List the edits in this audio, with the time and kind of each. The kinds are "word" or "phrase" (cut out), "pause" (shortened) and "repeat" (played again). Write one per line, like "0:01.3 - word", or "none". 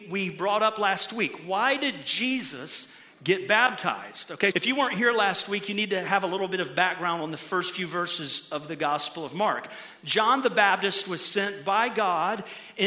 0:04.5 - word